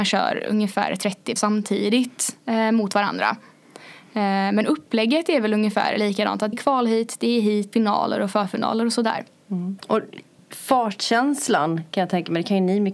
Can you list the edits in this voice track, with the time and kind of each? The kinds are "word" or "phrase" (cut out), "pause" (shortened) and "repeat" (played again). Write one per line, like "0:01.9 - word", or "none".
0:01.4 - word
0:06.5 - word
0:07.7 - word
0:10.4 - pause